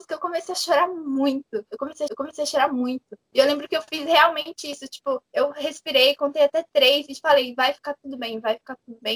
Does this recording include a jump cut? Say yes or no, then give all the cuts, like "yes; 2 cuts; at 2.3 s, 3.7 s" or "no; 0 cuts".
yes; 2 cuts; at 2.1 s, 5.3 s